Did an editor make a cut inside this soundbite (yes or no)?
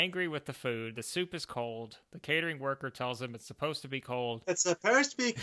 no